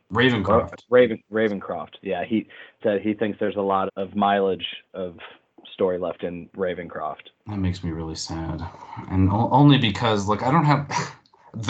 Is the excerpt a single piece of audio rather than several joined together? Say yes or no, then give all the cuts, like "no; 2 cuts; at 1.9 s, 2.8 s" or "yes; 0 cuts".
no; 3 cuts; at 2.8 s, 3.9 s, 7.4 s